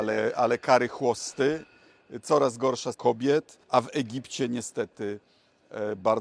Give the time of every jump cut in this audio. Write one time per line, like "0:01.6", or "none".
0:02.9
0:03.6